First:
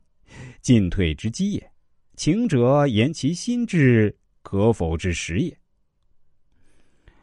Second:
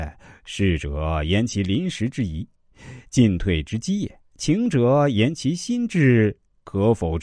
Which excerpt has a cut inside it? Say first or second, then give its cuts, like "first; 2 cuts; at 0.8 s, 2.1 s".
second; 1 cut; at 4.3 s